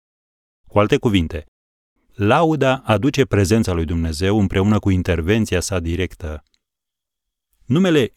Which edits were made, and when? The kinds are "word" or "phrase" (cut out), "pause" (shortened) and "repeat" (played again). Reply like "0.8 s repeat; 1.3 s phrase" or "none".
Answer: none